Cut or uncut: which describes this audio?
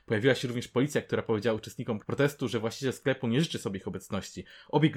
uncut